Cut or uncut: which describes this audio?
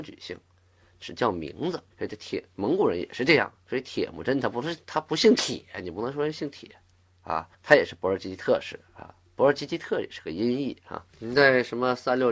cut